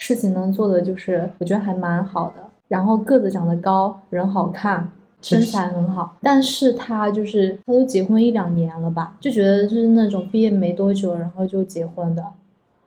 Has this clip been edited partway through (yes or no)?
yes